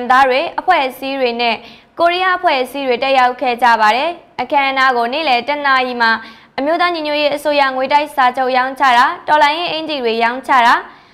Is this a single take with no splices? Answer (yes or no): yes